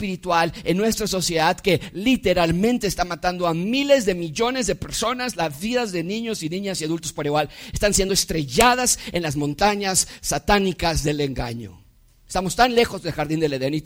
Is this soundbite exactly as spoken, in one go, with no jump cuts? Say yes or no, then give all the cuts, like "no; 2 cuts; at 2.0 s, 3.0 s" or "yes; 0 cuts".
yes; 0 cuts